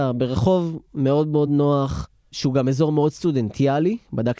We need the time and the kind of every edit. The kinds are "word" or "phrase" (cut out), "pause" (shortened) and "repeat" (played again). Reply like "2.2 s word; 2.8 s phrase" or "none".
none